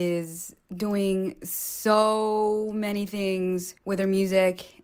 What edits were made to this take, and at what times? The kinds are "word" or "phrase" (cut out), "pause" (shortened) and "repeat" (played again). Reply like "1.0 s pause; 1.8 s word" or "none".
3.8 s pause